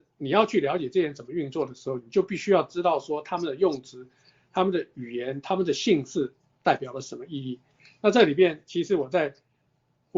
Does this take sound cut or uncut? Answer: uncut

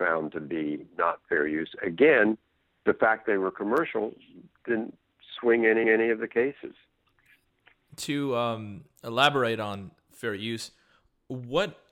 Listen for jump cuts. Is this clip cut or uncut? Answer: cut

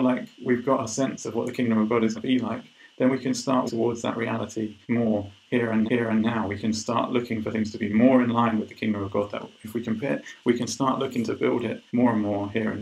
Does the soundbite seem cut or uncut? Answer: cut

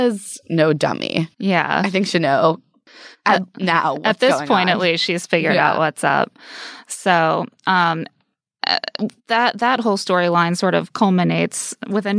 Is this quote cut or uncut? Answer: cut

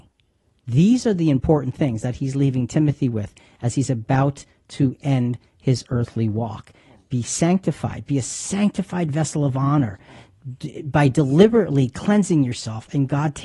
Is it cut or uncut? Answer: uncut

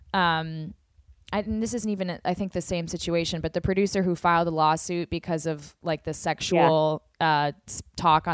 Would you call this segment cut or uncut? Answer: uncut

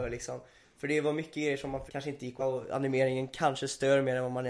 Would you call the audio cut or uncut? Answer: cut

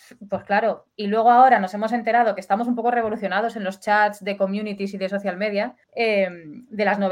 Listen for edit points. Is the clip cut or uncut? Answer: cut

